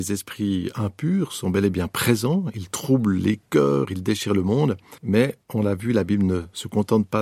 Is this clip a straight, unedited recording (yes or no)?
no